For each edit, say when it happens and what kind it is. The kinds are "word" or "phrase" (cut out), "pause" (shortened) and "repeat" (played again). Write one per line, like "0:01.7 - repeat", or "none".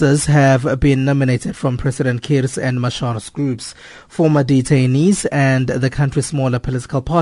none